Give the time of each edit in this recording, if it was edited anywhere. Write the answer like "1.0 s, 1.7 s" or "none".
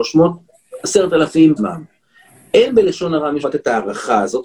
1.6 s, 3.4 s